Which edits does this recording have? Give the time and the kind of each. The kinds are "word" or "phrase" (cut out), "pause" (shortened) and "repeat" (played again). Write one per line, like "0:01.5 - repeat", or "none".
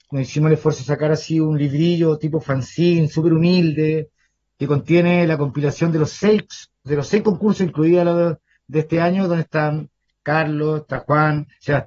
none